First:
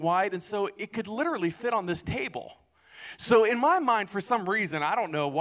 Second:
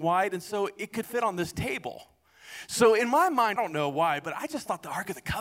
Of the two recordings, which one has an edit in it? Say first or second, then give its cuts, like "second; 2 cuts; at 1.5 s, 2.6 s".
second; 2 cuts; at 1.0 s, 3.6 s